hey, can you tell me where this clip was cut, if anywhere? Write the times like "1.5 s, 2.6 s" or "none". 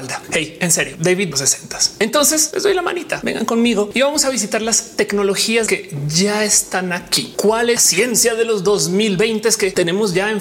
1.3 s, 5.7 s, 7.8 s